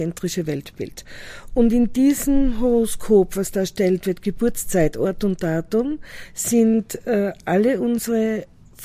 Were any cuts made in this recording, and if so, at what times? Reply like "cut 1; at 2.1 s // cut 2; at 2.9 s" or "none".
none

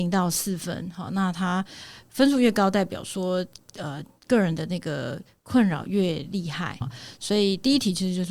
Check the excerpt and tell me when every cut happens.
cut 1; at 6.8 s

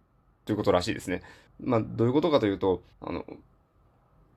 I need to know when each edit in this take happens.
cut 1; at 1.5 s // cut 2; at 2.9 s

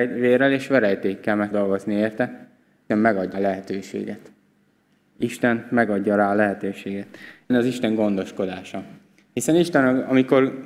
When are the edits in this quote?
cut 1; at 1.5 s // cut 2; at 2.9 s // cut 3; at 3.3 s // cut 4; at 7.5 s

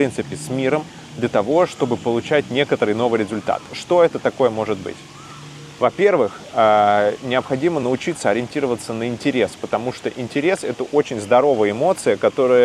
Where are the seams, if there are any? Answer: none

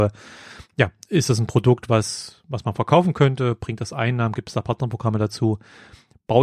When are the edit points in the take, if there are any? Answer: none

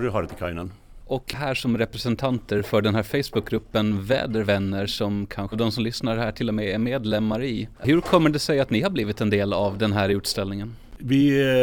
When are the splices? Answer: cut 1; at 1.3 s // cut 2; at 5.5 s

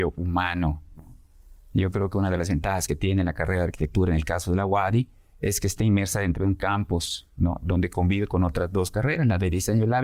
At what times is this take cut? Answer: none

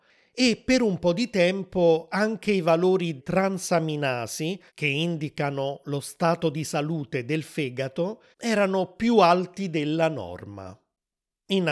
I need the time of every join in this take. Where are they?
cut 1; at 3.2 s // cut 2; at 4.7 s // cut 3; at 8.3 s

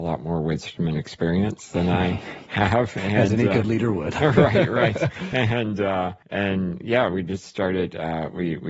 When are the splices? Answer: cut 1; at 6.2 s

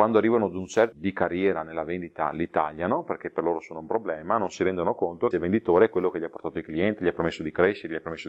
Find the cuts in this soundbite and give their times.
cut 1; at 0.9 s // cut 2; at 5.3 s

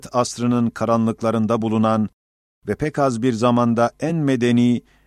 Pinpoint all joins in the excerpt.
none

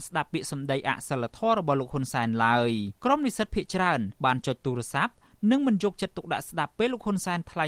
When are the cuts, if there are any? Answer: cut 1; at 3.0 s // cut 2; at 4.2 s

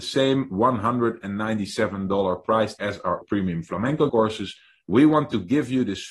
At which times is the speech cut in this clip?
cut 1; at 2.8 s // cut 2; at 3.2 s // cut 3; at 4.1 s

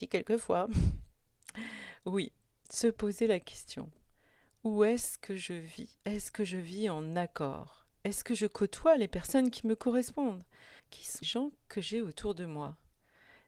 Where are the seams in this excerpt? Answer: cut 1; at 2.5 s // cut 2; at 6.0 s // cut 3; at 10.8 s // cut 4; at 11.2 s

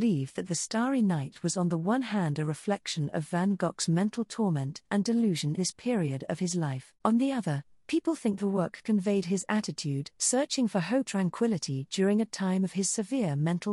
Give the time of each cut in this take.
cut 1; at 5.6 s // cut 2; at 7.0 s // cut 3; at 10.1 s // cut 4; at 11.1 s

